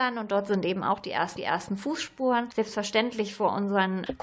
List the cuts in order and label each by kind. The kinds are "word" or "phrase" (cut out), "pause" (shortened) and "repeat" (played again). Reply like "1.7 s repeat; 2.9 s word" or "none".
1.4 s repeat